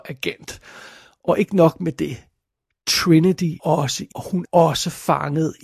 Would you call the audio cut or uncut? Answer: cut